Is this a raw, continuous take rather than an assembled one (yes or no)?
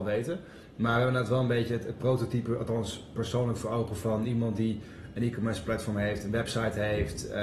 yes